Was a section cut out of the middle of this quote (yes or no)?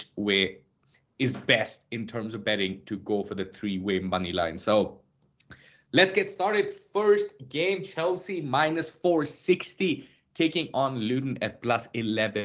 no